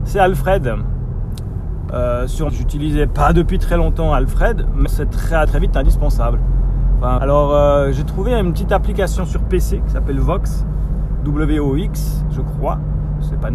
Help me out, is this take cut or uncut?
cut